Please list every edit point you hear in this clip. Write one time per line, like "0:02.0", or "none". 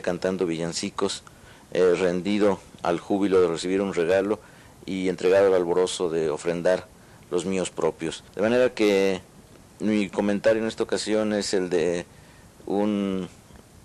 0:08.3